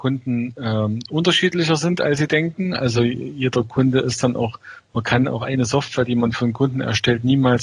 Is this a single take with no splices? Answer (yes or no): yes